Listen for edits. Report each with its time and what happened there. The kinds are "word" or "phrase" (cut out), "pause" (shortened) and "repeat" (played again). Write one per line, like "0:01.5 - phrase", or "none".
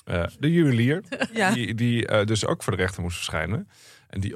none